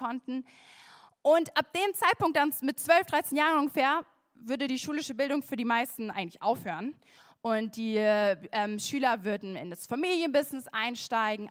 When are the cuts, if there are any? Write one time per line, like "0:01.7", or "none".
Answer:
none